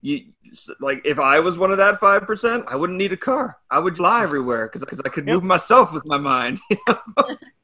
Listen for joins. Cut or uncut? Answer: cut